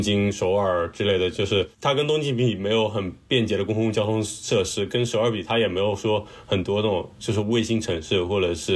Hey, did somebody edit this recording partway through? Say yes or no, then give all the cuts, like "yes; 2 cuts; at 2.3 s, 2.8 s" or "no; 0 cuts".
yes; 1 cut; at 1.7 s